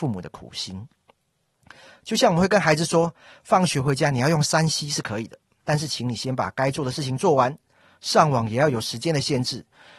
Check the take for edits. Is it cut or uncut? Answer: uncut